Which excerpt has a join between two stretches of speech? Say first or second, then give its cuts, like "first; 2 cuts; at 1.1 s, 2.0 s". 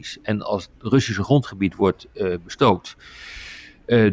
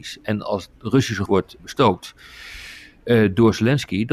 second; 2 cuts; at 1.3 s, 1.6 s